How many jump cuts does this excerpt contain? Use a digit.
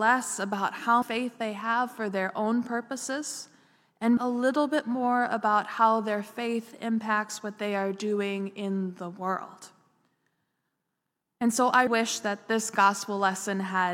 3